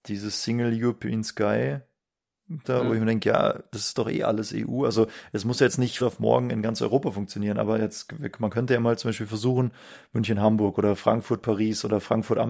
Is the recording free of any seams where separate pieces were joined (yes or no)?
no